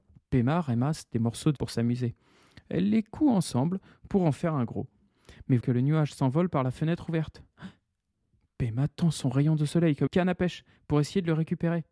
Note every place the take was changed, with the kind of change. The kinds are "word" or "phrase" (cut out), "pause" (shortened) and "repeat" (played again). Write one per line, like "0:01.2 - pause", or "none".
0:01.6 - word
0:05.6 - word
0:10.1 - word